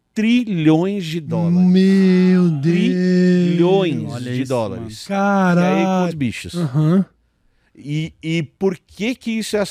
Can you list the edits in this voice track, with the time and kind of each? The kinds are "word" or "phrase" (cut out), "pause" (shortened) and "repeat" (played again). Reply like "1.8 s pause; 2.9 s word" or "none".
6.1 s phrase